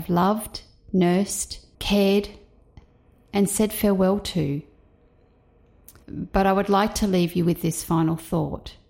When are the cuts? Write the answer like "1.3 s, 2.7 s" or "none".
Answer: 1.7 s, 6.0 s